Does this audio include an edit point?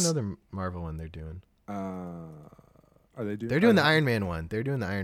yes; 1 cut; at 1.6 s

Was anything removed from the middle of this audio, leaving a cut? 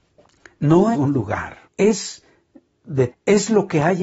yes; 3 cuts; at 0.9 s, 1.7 s, 3.1 s

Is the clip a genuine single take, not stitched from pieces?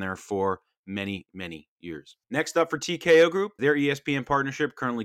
no; 3 cuts; at 1.3 s, 2.2 s, 3.6 s

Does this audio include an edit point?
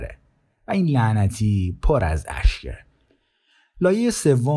no; 0 cuts

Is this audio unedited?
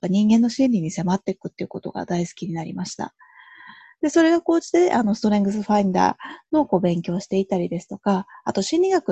yes; 0 cuts

